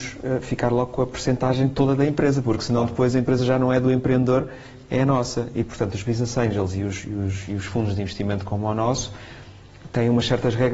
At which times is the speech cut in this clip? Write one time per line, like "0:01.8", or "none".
none